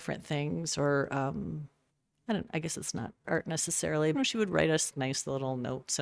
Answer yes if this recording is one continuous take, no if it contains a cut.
no